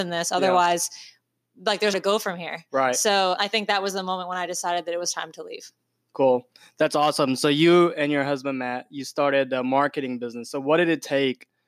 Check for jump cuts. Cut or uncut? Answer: cut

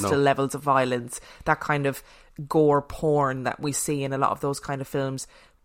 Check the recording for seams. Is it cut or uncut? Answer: uncut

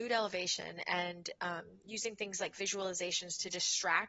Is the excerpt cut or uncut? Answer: uncut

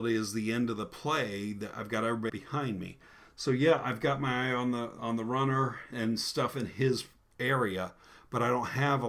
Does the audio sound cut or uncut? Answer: cut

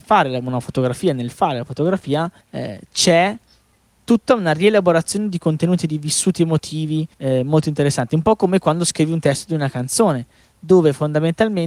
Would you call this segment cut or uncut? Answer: cut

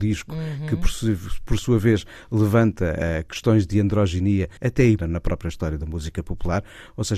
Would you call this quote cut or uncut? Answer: cut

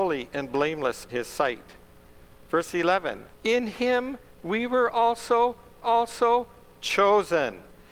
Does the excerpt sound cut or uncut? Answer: cut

